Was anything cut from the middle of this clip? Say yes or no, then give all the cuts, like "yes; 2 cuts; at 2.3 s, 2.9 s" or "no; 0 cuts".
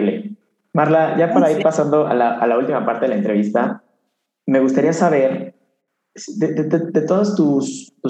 no; 0 cuts